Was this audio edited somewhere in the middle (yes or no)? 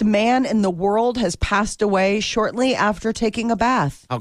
no